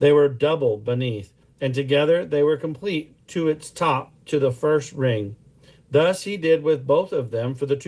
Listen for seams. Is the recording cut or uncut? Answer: uncut